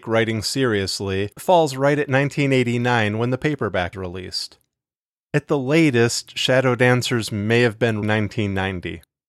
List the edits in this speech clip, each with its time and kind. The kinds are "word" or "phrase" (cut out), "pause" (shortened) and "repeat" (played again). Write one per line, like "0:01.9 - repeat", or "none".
0:01.4 - phrase
0:03.9 - word
0:08.0 - phrase